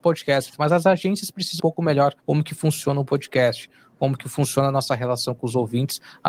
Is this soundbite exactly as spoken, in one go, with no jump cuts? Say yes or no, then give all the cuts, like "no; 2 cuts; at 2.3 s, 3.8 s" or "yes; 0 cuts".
no; 2 cuts; at 1.6 s, 2.2 s